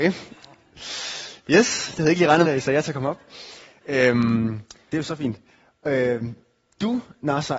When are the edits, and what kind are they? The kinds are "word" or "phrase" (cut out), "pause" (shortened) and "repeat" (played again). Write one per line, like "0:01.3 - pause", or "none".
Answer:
0:02.4 - word
0:04.9 - word

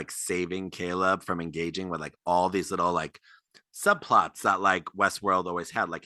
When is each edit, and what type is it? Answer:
none

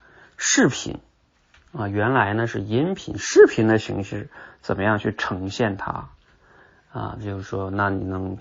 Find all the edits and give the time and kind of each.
none

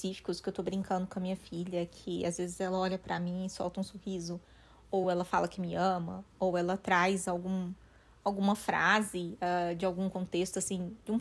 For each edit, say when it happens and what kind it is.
none

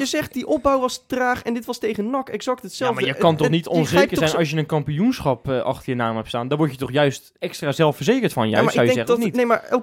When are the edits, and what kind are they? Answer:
0:07.4 - pause

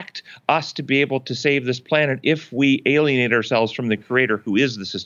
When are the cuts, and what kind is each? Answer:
none

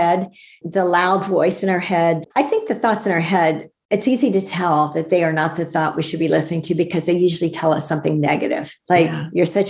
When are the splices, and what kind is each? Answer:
0:02.3 - pause
0:08.8 - pause

